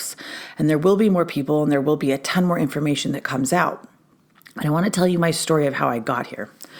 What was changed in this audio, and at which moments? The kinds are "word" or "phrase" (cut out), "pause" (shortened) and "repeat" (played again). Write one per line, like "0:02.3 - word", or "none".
none